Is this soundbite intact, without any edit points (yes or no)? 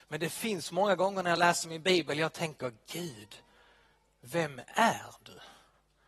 yes